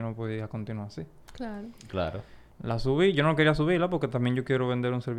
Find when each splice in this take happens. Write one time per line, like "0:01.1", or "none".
0:02.5